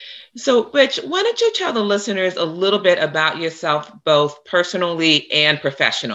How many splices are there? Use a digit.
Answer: 0